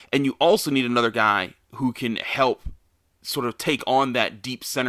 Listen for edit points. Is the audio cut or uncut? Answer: cut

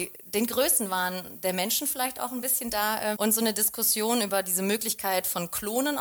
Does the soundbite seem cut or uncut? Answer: cut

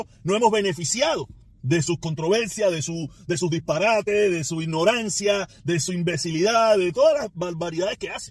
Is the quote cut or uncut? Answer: uncut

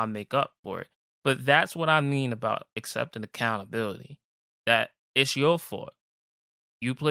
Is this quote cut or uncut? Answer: uncut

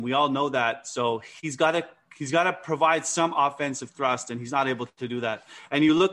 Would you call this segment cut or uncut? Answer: uncut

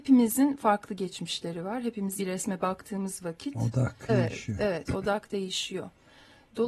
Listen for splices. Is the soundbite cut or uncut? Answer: cut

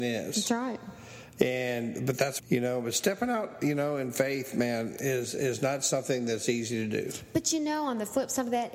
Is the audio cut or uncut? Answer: cut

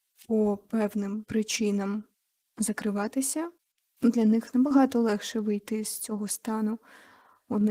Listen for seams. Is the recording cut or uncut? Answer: uncut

